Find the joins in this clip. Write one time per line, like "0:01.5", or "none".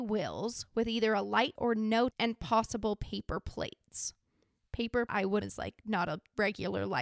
0:01.6
0:02.1
0:05.1
0:05.4